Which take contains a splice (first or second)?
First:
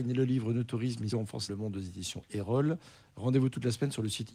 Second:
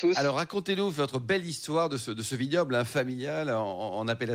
first